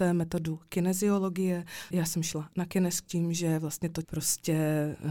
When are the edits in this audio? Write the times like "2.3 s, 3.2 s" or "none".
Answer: 1.9 s, 3.1 s, 4.0 s